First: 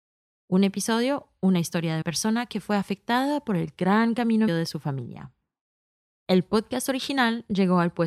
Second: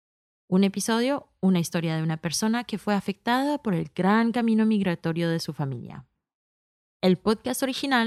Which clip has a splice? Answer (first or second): first